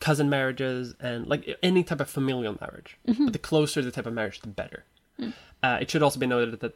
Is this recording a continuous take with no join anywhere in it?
yes; 0 cuts

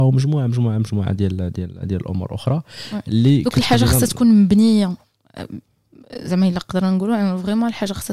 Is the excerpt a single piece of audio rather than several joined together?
yes; 0 cuts

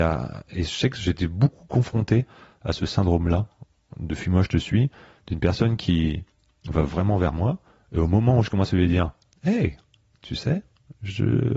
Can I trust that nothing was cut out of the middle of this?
yes; 0 cuts

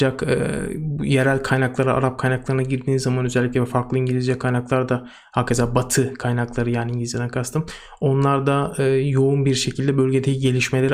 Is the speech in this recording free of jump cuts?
yes; 0 cuts

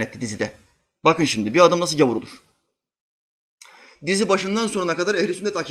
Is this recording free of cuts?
yes; 0 cuts

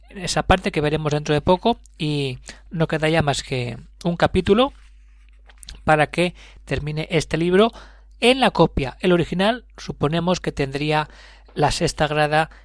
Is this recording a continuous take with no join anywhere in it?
yes; 0 cuts

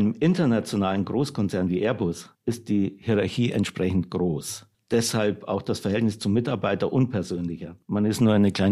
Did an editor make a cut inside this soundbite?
yes; 1 cut; at 2.3 s

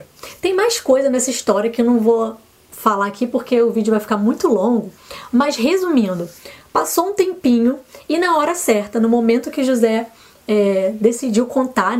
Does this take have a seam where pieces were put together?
no; 0 cuts

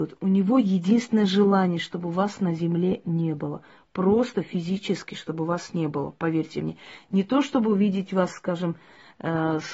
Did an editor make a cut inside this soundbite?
no; 0 cuts

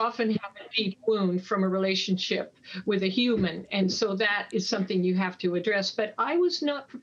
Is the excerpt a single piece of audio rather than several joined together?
yes; 0 cuts

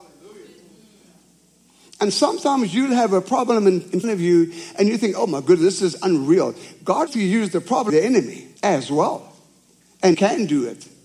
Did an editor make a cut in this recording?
yes; 5 cuts; at 4.0 s, 7.1 s, 7.9 s, 8.6 s, 10.1 s

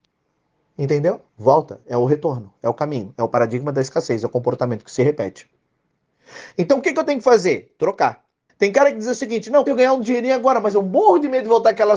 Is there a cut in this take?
yes; 3 cuts; at 1.3 s, 8.5 s, 9.7 s

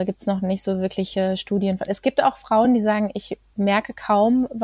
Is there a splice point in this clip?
no; 0 cuts

